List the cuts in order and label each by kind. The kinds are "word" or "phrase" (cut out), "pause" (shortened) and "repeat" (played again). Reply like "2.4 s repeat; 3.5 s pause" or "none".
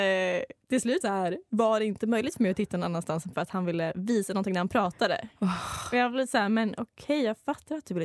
1.0 s word; 3.3 s phrase